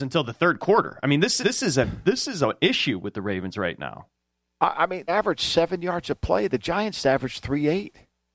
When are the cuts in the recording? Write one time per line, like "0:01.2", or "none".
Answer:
0:01.4
0:05.1